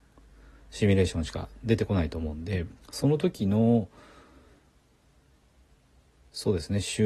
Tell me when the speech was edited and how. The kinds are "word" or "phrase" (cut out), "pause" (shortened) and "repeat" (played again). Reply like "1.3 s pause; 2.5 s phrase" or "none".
2.8 s pause